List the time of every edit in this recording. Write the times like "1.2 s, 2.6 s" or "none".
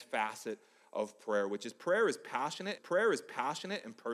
2.8 s